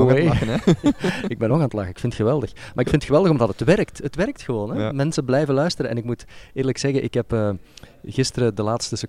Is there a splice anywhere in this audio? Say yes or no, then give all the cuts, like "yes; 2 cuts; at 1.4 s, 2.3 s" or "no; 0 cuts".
no; 0 cuts